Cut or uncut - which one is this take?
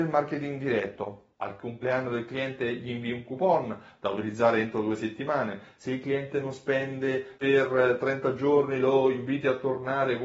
cut